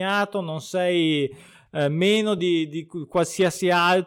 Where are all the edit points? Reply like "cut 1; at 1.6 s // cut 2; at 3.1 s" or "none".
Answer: none